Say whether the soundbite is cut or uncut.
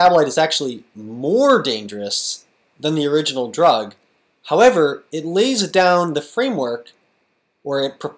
uncut